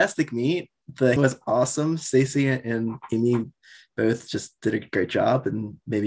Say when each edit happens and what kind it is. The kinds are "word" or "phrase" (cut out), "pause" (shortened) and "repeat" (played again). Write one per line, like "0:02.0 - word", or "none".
0:01.2 - word